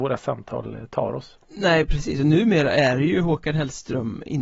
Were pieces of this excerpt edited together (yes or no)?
no